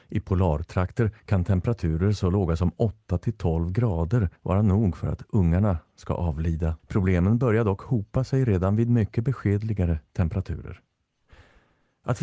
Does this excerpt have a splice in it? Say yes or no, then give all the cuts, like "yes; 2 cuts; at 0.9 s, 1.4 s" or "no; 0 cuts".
yes; 3 cuts; at 1.2 s, 4.4 s, 6.8 s